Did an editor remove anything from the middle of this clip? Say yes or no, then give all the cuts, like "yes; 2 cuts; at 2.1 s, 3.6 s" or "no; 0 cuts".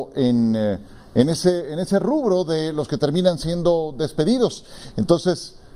no; 0 cuts